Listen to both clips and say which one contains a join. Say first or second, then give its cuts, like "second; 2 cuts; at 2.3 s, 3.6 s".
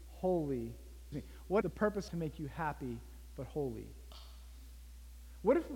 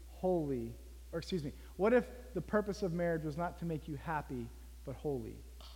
first; 3 cuts; at 1.1 s, 1.6 s, 2.1 s